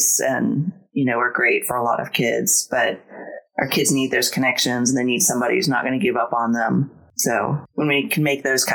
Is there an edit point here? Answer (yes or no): no